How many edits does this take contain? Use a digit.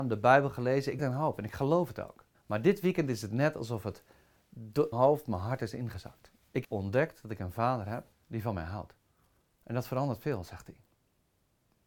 6